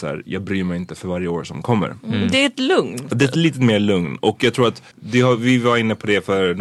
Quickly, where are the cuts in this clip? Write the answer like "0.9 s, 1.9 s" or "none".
4.9 s